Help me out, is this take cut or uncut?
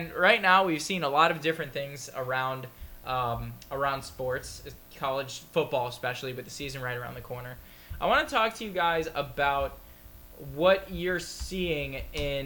uncut